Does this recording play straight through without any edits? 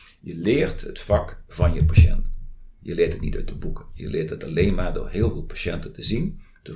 yes; 0 cuts

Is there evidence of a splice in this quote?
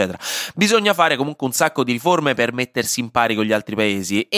no; 0 cuts

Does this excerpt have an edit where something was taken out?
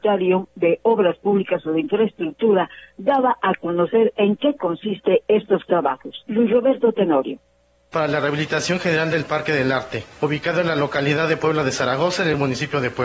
no; 0 cuts

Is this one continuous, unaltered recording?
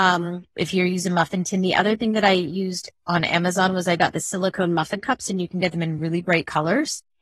yes; 0 cuts

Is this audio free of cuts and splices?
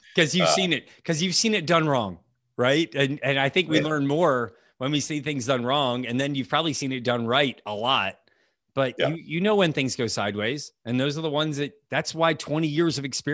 yes; 0 cuts

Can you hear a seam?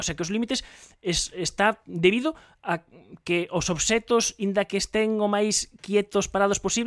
no; 0 cuts

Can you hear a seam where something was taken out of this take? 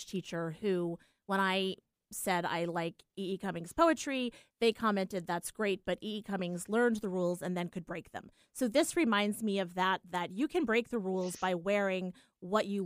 no; 0 cuts

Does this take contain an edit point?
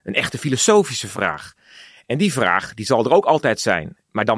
yes; 1 cut; at 1.1 s

